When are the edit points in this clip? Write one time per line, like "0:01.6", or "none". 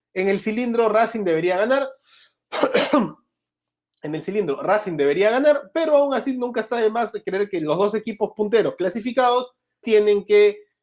0:09.8